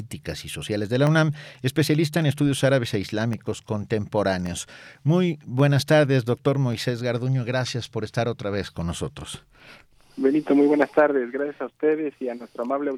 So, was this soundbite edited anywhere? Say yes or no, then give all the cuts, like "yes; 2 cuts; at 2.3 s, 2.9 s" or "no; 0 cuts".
no; 0 cuts